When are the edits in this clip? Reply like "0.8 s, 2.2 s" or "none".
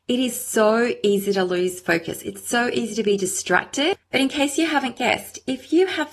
4.0 s